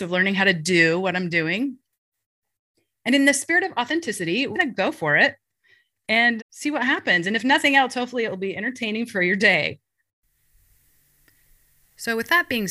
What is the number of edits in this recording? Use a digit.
2